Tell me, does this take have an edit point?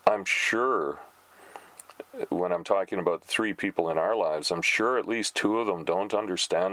no; 0 cuts

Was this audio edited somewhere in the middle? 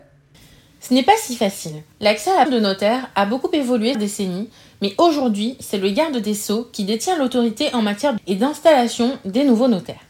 yes; 4 cuts; at 1.9 s, 2.5 s, 3.9 s, 8.2 s

